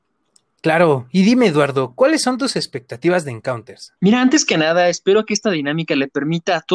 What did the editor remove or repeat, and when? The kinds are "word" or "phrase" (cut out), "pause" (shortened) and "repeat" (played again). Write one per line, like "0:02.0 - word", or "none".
0:04.0 - pause